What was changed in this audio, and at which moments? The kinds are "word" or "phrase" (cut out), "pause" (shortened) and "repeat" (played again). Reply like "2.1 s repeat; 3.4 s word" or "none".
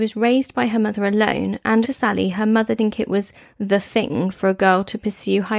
1.8 s word; 2.8 s word